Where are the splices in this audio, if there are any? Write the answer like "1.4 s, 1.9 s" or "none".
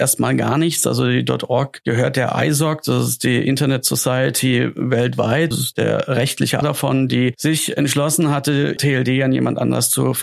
5.5 s, 6.6 s, 8.8 s